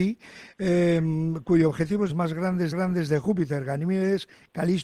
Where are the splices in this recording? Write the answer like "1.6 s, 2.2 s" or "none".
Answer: 2.1 s, 2.7 s